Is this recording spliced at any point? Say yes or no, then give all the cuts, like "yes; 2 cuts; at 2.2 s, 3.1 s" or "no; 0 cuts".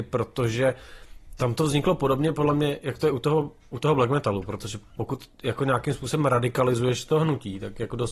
no; 0 cuts